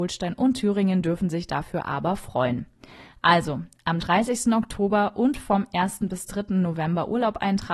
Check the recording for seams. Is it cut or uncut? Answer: uncut